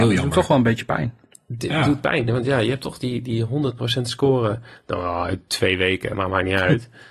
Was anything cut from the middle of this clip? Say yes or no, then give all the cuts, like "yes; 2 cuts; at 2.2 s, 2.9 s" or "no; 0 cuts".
no; 0 cuts